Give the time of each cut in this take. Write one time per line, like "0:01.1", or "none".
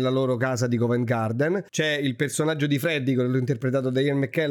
0:01.7